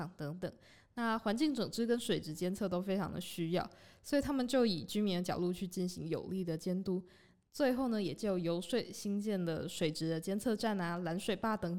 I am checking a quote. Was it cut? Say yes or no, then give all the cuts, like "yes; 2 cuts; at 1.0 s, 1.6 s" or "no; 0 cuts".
no; 0 cuts